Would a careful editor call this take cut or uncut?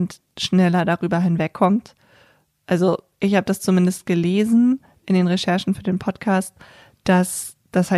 uncut